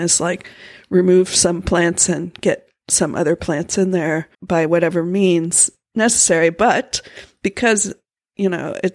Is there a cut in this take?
yes; 1 cut; at 4.3 s

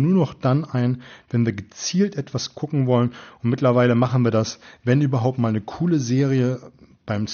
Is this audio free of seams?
yes; 0 cuts

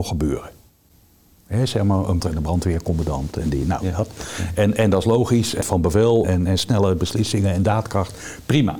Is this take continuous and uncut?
no; 3 cuts; at 2.2 s, 5.6 s, 6.2 s

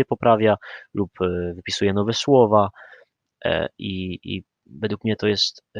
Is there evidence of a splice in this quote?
no; 0 cuts

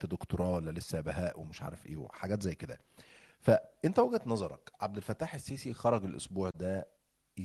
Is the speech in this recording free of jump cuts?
yes; 0 cuts

